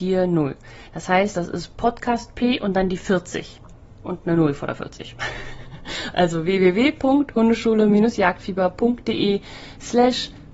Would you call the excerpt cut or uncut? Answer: uncut